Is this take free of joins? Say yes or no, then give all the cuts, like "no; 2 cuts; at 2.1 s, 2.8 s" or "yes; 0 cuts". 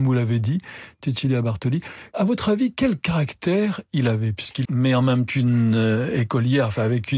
no; 2 cuts; at 4.6 s, 5.3 s